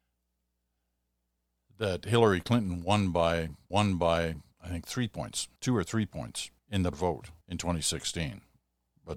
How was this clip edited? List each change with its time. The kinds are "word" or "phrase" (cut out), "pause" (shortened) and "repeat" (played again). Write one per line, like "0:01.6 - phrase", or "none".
0:03.7 - repeat
0:05.6 - pause
0:06.6 - pause
0:06.9 - word
0:07.4 - pause